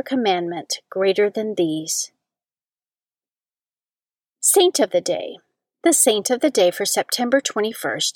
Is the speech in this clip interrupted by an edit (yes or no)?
no